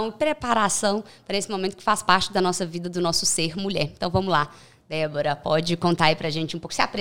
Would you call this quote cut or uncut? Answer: uncut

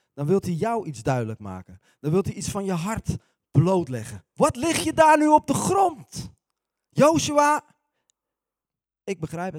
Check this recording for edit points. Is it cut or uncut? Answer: uncut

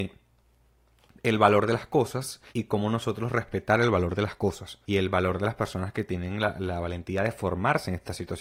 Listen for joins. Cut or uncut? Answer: cut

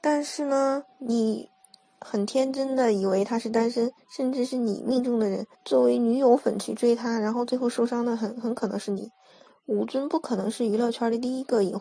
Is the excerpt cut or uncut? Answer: cut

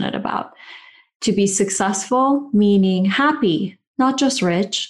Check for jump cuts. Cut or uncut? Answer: uncut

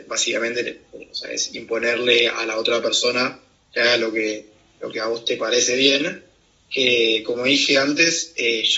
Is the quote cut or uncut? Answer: uncut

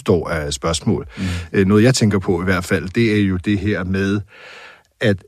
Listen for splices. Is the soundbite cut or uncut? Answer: uncut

